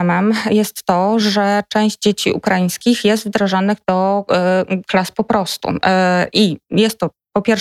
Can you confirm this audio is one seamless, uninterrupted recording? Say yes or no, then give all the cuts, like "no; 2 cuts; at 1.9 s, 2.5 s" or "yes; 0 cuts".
yes; 0 cuts